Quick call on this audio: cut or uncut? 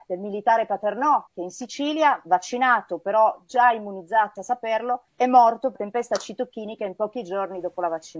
cut